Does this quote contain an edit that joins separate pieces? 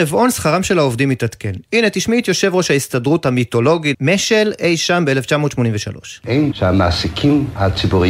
yes; 2 cuts; at 3.9 s, 6.5 s

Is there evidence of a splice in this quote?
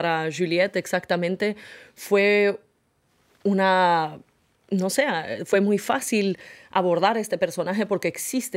no; 0 cuts

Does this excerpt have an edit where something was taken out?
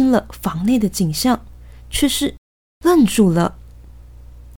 no; 0 cuts

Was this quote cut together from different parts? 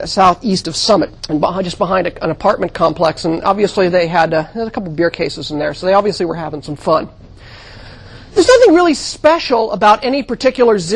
yes; 1 cut; at 1.2 s

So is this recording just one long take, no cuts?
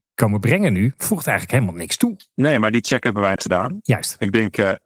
no; 1 cut; at 3.4 s

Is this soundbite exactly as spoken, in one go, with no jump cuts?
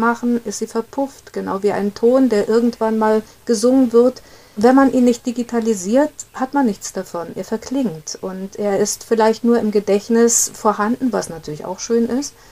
yes; 0 cuts

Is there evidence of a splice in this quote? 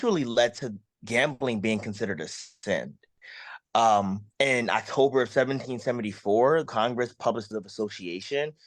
yes; 3 cuts; at 4.3 s, 6.7 s, 7.5 s

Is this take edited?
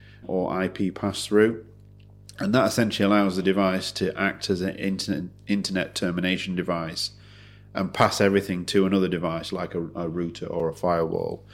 no; 0 cuts

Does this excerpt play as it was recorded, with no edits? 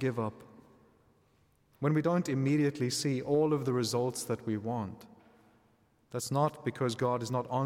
yes; 0 cuts

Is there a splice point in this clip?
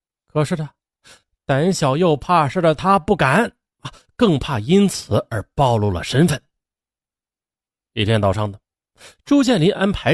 no; 0 cuts

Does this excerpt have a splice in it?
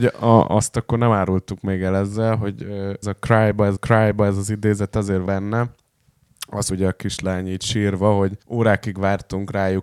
yes; 5 cuts; at 3.0 s, 3.8 s, 5.3 s, 6.7 s, 8.4 s

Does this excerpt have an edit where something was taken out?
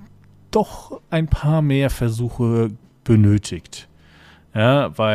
no; 0 cuts

